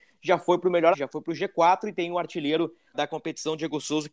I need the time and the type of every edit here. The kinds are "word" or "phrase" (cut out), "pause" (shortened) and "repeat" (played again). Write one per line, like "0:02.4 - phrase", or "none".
0:00.9 - word
0:02.9 - word